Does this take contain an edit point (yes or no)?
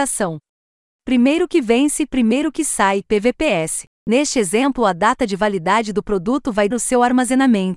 yes